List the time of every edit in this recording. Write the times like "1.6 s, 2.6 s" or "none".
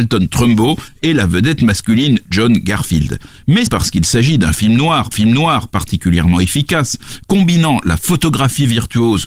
3.7 s, 5.1 s